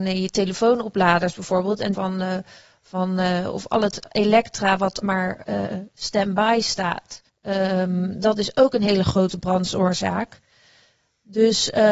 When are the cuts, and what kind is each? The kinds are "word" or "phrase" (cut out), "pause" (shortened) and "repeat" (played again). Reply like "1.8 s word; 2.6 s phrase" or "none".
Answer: 1.9 s phrase; 5.0 s word; 7.3 s pause

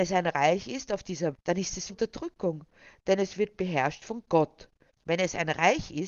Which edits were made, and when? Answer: 1.3 s word; 1.9 s word; 4.9 s pause

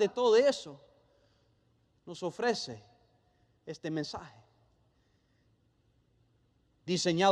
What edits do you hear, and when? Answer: none

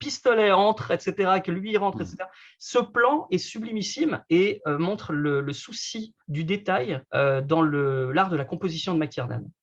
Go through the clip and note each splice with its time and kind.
6.2 s pause; 7.1 s pause

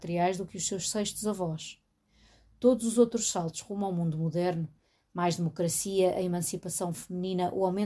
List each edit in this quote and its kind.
none

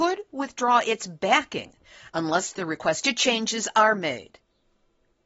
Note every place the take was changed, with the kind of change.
none

